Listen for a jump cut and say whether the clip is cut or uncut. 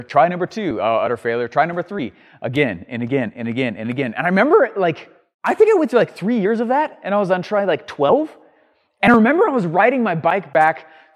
uncut